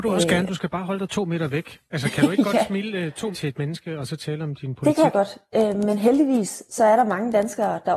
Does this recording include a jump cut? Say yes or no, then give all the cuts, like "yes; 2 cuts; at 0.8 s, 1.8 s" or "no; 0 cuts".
yes; 1 cut; at 3.3 s